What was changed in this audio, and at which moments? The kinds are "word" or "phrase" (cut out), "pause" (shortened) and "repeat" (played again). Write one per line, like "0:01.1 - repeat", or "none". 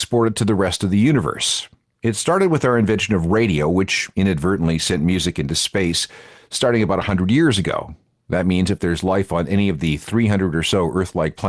none

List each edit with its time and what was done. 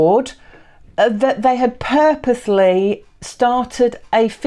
none

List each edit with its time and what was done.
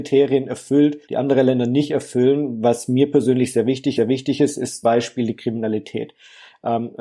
0:01.0 - pause
0:04.0 - repeat
0:04.8 - word

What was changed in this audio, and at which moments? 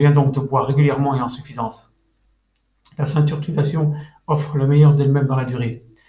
none

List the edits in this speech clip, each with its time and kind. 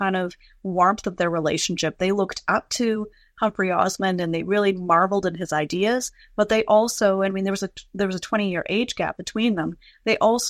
none

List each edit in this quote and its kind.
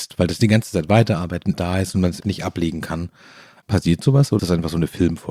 0:01.5 - word
0:02.2 - word
0:04.4 - word

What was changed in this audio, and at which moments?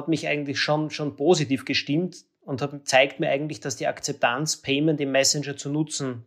none

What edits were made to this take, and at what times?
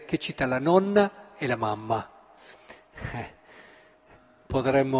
none

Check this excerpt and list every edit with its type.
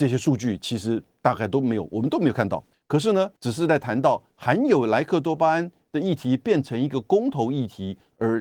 0:02.7 - pause
0:03.4 - pause

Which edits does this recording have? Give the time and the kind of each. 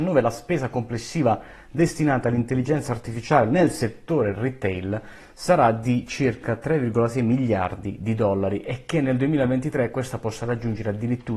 none

